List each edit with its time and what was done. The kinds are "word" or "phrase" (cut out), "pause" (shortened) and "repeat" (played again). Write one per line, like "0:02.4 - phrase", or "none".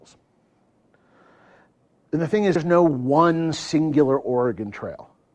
0:02.6 - word